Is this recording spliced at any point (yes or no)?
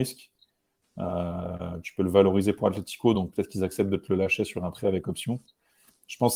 no